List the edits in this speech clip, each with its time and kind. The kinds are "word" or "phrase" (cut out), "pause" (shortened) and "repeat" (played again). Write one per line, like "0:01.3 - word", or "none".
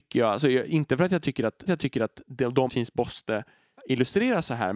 0:01.7 - repeat
0:02.7 - word
0:03.8 - word

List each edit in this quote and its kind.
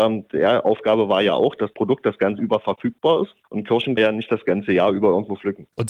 0:01.7 - word
0:02.4 - word
0:03.4 - pause
0:04.0 - phrase

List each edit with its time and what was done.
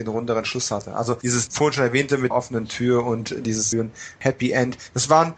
0:02.3 - word
0:03.7 - word

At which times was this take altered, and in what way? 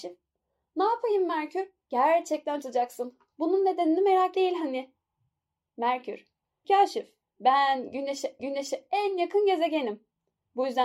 0:02.6 - word
0:04.3 - word
0:06.6 - phrase
0:08.4 - repeat

